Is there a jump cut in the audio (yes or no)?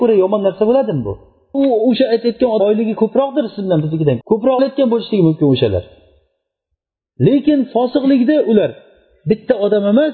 yes